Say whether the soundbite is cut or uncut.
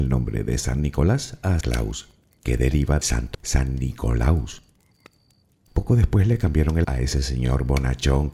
cut